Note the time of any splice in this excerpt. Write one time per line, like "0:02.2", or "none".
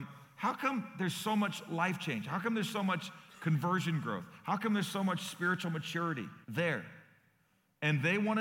0:06.4